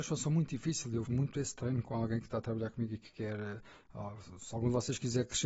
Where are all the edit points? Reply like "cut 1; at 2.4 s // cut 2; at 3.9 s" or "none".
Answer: cut 1; at 1.1 s

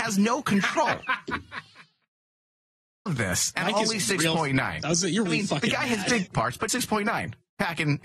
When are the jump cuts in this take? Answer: cut 1; at 3.1 s // cut 2; at 5.3 s // cut 3; at 6.3 s // cut 4; at 6.7 s

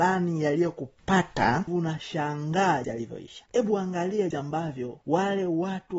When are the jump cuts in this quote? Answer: cut 1; at 1.7 s // cut 2; at 2.8 s // cut 3; at 4.3 s

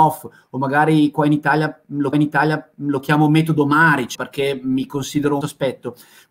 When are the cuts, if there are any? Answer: cut 1; at 2.1 s // cut 2; at 4.1 s // cut 3; at 5.4 s

